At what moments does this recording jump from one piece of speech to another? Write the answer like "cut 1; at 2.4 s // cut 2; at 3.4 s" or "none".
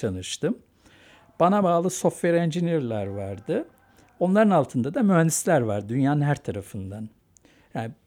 none